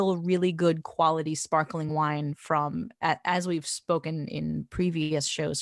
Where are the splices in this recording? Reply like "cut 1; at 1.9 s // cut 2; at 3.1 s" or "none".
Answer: none